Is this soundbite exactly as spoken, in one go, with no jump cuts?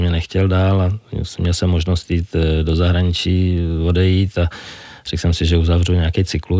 yes; 0 cuts

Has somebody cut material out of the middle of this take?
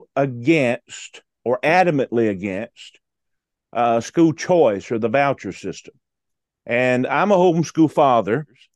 no; 0 cuts

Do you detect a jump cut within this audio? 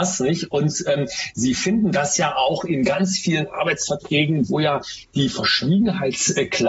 no; 0 cuts

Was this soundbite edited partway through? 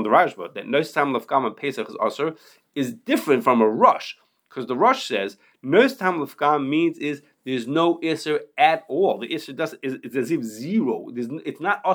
no; 0 cuts

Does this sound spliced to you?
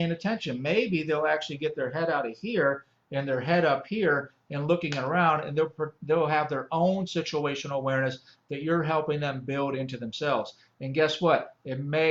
no; 0 cuts

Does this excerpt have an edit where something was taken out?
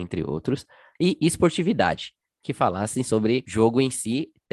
no; 0 cuts

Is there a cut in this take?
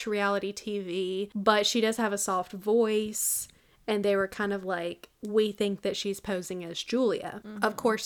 yes; 1 cut; at 5.1 s

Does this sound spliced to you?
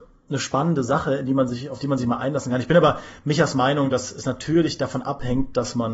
no; 0 cuts

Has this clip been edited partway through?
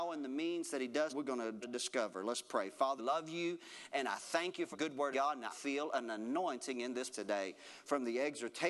yes; 7 cuts; at 1.1 s, 1.6 s, 3.0 s, 4.7 s, 5.1 s, 5.5 s, 7.1 s

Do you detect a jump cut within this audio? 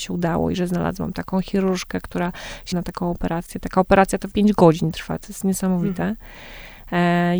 yes; 2 cuts; at 2.7 s, 4.3 s

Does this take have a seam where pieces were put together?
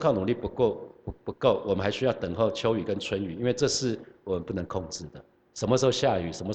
yes; 1 cut; at 5.4 s

